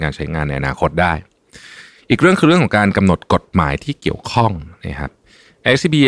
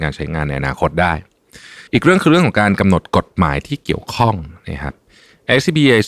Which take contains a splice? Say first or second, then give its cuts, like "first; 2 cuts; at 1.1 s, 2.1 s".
second; 1 cut; at 1.9 s